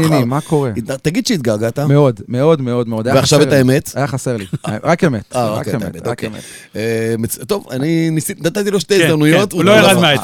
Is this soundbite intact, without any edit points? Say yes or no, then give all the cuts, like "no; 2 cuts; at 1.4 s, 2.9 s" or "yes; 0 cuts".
yes; 0 cuts